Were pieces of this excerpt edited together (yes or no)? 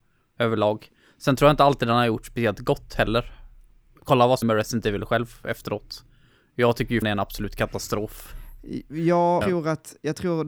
yes